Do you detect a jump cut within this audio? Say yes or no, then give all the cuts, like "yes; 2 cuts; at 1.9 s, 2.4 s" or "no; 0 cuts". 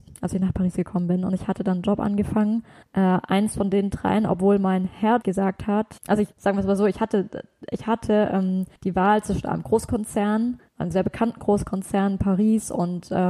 yes; 6 cuts; at 2.8 s, 5.2 s, 6.0 s, 6.3 s, 8.8 s, 10.7 s